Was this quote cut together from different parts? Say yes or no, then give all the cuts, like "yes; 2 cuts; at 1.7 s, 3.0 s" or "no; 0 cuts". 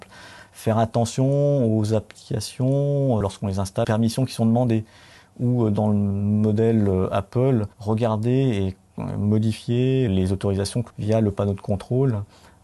yes; 5 cuts; at 3.2 s, 3.8 s, 7.7 s, 10.1 s, 10.9 s